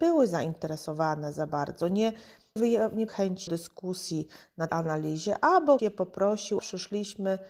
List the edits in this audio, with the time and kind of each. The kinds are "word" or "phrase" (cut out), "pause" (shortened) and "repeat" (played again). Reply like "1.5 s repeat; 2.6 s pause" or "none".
2.6 s word; 3.1 s word; 3.5 s word; 4.7 s word; 5.8 s word; 6.6 s word